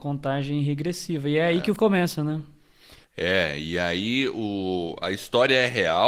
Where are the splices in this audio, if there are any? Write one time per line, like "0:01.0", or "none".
0:01.8
0:03.0